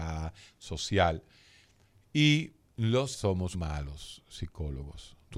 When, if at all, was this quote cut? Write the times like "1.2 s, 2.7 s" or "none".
3.1 s, 3.5 s